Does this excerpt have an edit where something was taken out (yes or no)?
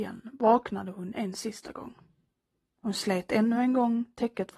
no